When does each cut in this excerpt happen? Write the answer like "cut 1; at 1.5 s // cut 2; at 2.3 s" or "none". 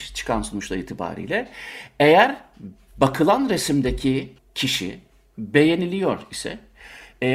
cut 1; at 4.4 s